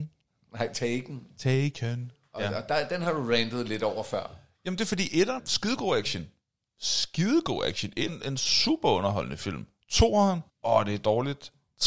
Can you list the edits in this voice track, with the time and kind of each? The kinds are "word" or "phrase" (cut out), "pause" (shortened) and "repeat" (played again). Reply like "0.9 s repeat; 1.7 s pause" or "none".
5.4 s word; 8.1 s word; 10.5 s pause